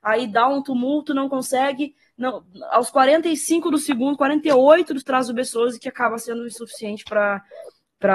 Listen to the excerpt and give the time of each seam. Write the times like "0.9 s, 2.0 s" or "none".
5.0 s